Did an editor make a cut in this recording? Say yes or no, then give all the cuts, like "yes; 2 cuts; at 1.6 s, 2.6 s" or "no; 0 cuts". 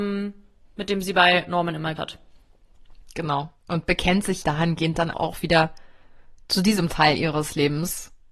yes; 3 cuts; at 2.0 s, 4.4 s, 5.1 s